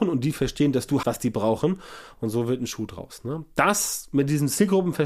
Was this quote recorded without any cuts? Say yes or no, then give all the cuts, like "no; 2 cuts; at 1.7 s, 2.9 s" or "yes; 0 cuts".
no; 1 cut; at 1.0 s